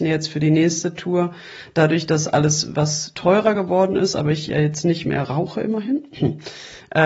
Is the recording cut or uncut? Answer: uncut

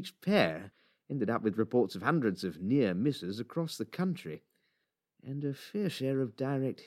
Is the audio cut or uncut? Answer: uncut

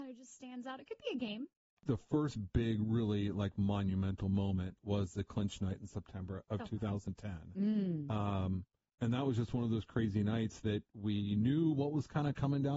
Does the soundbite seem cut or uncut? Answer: uncut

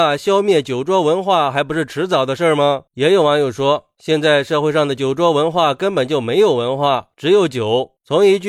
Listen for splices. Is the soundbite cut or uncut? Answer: cut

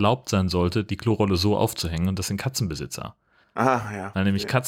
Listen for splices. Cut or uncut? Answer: cut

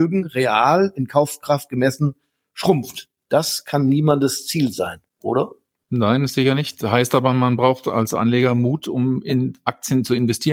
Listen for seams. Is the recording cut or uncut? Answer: uncut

